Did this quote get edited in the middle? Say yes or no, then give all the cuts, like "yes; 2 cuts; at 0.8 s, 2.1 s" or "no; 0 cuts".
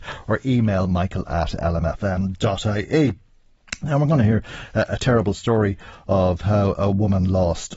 no; 0 cuts